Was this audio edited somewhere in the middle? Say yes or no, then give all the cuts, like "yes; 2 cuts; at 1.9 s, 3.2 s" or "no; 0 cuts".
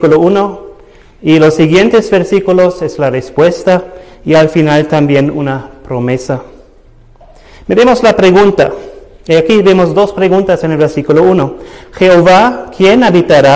no; 0 cuts